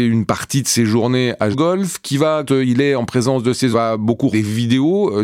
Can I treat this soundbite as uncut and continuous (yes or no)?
no